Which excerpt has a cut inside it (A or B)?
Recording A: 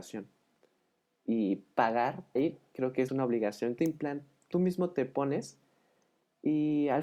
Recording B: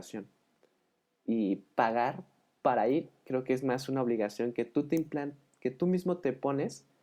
A